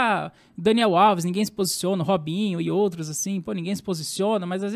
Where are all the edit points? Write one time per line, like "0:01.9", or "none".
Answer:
none